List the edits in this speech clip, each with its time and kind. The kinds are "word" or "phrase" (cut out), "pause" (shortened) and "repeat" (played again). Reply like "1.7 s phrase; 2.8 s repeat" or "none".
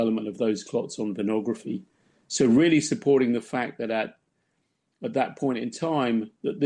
none

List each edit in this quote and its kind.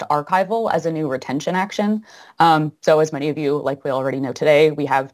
none

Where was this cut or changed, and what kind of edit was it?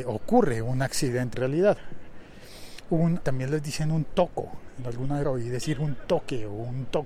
1.3 s word; 3.2 s word; 5.2 s word

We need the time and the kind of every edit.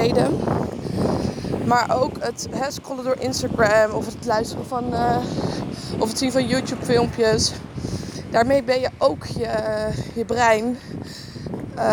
none

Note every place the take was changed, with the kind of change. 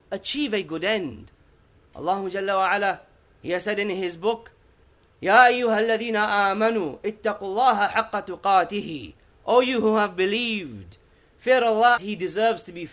12.0 s word

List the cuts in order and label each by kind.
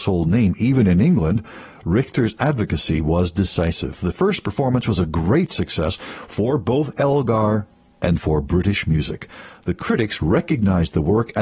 none

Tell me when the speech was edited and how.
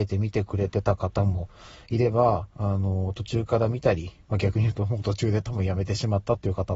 4.2 s pause

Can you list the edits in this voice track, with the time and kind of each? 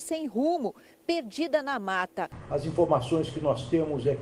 none

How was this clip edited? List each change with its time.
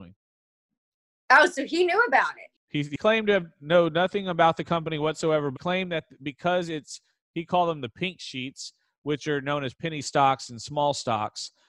5.5 s word

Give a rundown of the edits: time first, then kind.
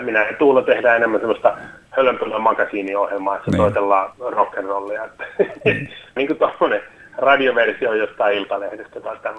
6.2 s word

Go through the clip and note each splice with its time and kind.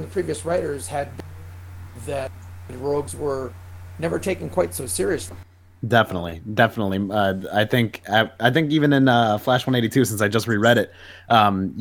none

